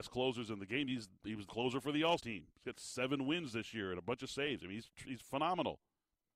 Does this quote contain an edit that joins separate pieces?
yes; 2 cuts; at 1.5 s, 2.2 s

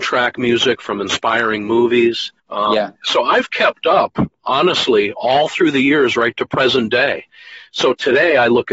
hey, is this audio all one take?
no; 2 cuts; at 2.4 s, 3.0 s

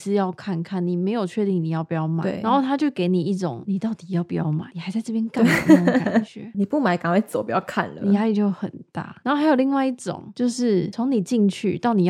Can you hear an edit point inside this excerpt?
yes; 1 cut; at 6.5 s

